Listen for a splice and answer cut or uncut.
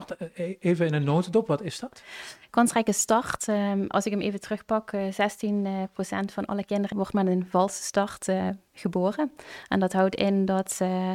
cut